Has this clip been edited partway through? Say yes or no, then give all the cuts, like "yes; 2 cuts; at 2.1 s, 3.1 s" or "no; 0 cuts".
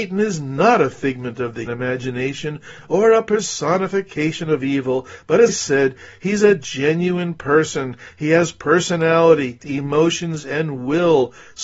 yes; 3 cuts; at 1.7 s, 5.5 s, 9.6 s